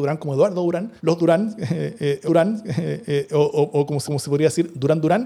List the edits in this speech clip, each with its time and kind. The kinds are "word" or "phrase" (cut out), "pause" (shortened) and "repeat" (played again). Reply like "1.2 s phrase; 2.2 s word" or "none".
1.0 s pause; 2.3 s repeat; 4.1 s repeat